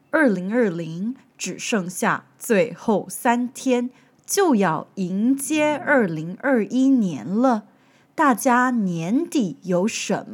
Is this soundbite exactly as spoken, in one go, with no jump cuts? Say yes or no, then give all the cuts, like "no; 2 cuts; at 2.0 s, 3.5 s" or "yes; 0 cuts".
yes; 0 cuts